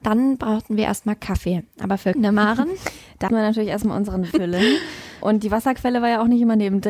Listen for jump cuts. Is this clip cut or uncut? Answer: cut